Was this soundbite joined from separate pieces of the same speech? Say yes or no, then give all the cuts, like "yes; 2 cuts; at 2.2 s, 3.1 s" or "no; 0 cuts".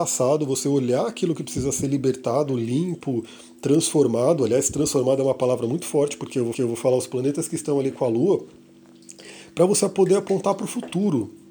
yes; 1 cut; at 6.5 s